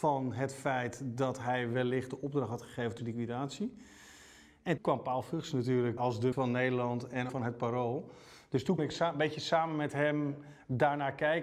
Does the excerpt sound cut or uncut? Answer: cut